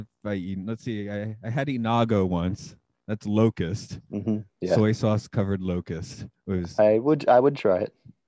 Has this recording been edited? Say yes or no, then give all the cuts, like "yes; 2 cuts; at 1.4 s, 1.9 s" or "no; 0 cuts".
no; 0 cuts